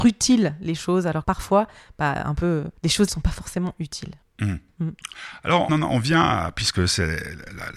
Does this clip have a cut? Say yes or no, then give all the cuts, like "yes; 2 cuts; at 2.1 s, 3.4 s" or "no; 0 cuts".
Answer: yes; 5 cuts; at 1.2 s, 2.8 s, 3.1 s, 4.2 s, 5.7 s